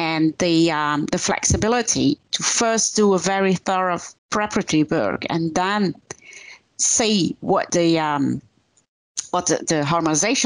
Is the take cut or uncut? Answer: cut